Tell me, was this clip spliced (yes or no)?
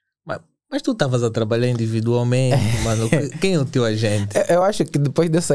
no